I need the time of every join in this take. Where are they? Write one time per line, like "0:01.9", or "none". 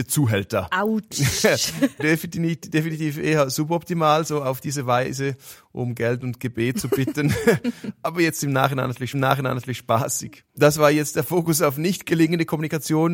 0:02.0
0:09.1

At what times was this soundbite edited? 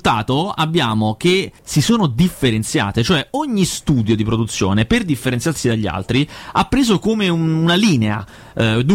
0:01.6

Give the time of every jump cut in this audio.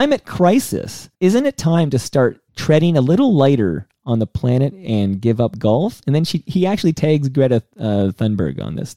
0:01.1
0:02.5

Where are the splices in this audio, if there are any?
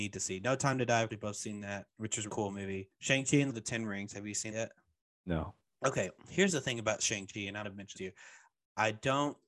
0:01.1
0:01.9
0:02.3
0:03.5
0:04.5
0:07.6
0:08.0

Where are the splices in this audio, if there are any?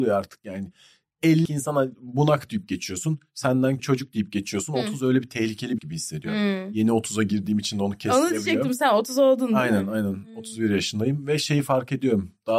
0:01.5
0:03.8
0:05.8

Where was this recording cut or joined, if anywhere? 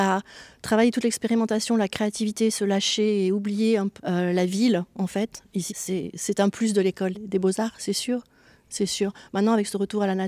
0:04.0
0:05.7
0:07.1

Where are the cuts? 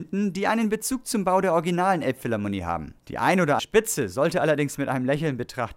0:03.0
0:03.6

